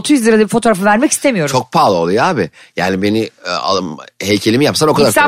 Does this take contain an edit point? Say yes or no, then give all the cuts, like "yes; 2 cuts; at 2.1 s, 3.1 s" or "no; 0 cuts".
no; 0 cuts